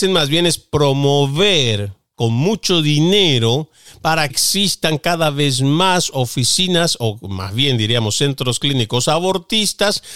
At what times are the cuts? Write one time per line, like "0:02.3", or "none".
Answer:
0:04.3